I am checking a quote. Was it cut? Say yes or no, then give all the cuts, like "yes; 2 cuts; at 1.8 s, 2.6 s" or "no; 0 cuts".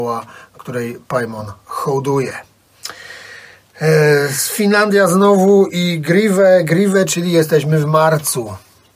no; 0 cuts